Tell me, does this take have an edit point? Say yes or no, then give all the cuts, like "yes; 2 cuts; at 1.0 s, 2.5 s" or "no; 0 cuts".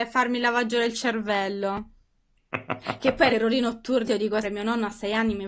yes; 3 cuts; at 3.3 s, 4.1 s, 4.4 s